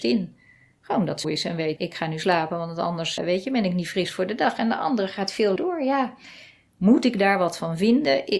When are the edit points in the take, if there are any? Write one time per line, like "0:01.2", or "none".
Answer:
0:01.2
0:01.8
0:03.2
0:05.6